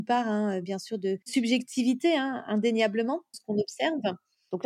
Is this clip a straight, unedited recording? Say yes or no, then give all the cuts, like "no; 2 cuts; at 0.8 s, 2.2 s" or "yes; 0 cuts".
no; 2 cuts; at 1.2 s, 3.3 s